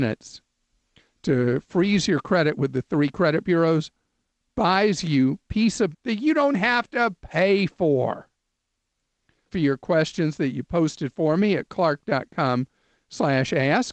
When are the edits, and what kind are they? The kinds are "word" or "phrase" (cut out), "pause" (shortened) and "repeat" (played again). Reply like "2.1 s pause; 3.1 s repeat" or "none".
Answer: 5.9 s word; 6.5 s word; 9.5 s word